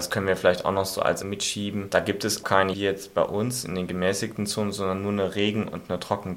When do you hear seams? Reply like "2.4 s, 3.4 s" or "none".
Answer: 1.2 s, 2.4 s, 2.7 s